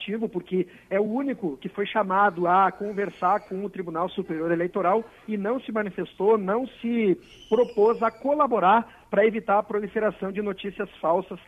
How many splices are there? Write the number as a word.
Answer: zero